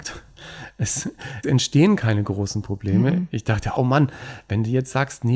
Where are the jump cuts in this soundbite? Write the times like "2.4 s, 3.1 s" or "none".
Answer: 1.4 s, 3.8 s